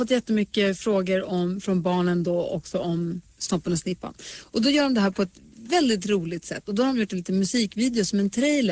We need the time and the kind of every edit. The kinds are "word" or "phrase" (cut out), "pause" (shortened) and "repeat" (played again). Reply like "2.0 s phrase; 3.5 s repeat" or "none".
none